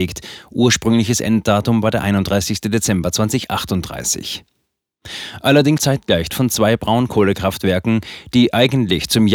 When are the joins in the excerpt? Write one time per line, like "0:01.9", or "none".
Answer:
0:05.8
0:06.3